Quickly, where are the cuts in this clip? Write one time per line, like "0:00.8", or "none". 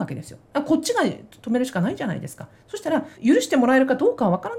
0:03.1

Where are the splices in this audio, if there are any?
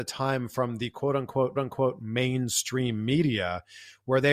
0:01.6

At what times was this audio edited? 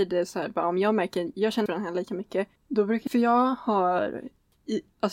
0:01.7
0:02.6
0:03.1

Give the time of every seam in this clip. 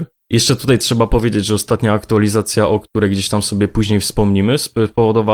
none

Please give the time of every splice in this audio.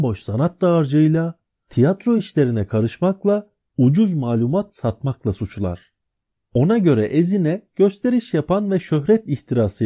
none

